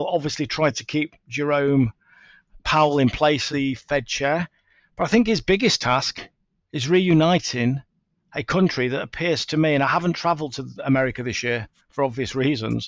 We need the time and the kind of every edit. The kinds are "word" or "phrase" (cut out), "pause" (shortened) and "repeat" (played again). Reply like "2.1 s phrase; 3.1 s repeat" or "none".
3.5 s word